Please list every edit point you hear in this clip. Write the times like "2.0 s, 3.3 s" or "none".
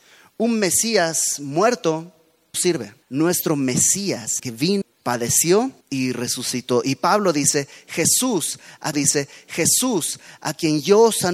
2.5 s, 3.0 s, 4.4 s, 4.8 s, 5.8 s, 8.9 s